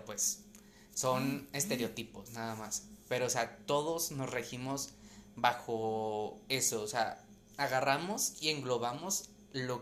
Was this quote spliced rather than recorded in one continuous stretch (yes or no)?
no